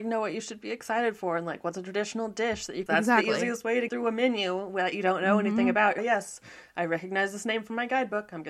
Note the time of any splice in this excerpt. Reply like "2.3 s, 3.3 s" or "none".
2.9 s, 3.9 s, 6.0 s